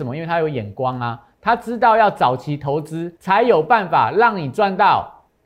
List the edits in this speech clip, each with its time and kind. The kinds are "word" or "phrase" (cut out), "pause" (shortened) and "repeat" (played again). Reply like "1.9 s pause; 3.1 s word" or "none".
3.2 s pause